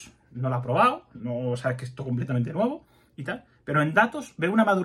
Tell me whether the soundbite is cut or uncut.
uncut